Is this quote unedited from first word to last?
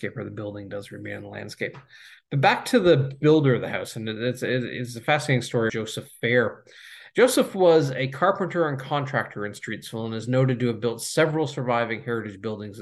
no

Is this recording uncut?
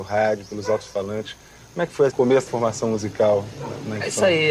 no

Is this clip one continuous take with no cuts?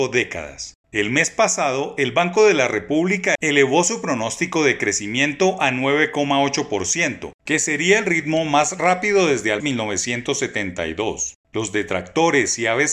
no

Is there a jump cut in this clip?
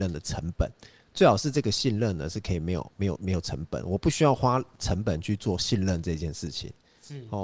no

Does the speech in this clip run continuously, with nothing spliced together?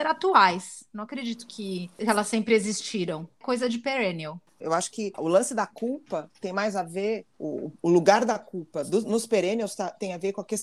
yes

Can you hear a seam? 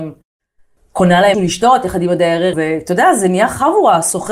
yes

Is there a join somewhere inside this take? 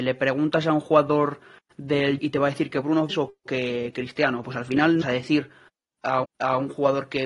yes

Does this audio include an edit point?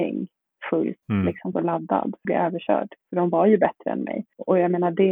yes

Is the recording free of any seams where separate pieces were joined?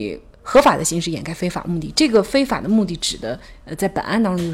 yes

